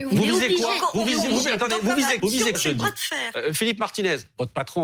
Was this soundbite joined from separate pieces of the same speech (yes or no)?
yes